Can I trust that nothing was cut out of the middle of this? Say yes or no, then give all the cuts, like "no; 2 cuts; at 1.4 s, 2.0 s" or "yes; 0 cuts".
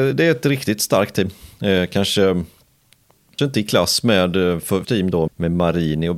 no; 3 cuts; at 3.4 s, 4.8 s, 5.3 s